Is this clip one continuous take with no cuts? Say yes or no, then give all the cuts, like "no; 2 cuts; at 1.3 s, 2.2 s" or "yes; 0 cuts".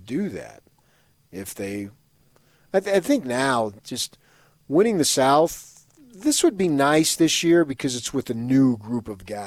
yes; 0 cuts